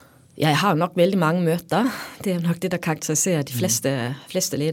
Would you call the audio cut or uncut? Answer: uncut